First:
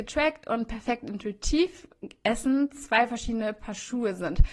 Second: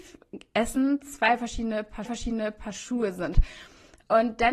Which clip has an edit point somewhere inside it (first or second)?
second